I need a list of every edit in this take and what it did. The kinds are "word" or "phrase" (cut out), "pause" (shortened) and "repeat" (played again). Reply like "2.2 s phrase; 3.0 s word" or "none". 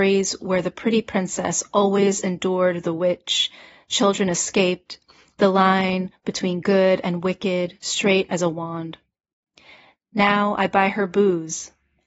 none